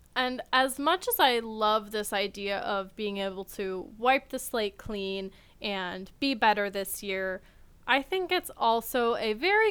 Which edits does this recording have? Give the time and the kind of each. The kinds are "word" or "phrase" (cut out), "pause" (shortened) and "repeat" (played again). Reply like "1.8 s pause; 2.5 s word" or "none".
none